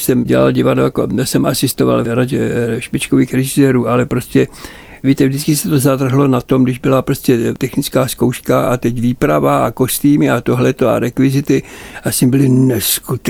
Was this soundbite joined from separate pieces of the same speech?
no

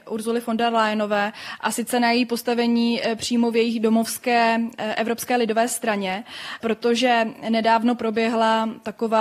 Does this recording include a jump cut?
no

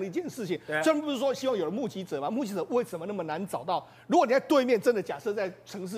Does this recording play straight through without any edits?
yes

